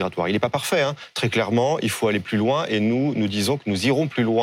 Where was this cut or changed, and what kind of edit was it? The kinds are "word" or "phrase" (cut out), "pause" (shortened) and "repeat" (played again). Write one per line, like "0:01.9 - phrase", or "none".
none